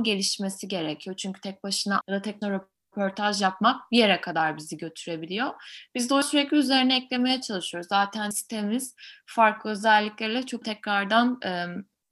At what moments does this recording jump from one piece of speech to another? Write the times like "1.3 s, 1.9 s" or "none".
2.0 s, 2.4 s, 6.2 s, 8.3 s, 10.6 s

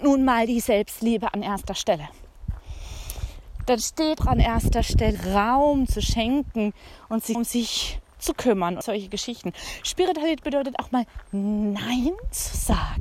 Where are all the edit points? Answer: 4.2 s, 5.1 s, 7.3 s, 8.8 s

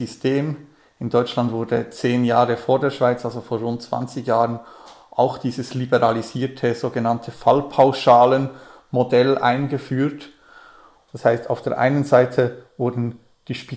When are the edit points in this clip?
none

